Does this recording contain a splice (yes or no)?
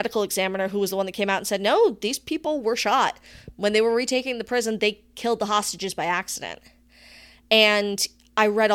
no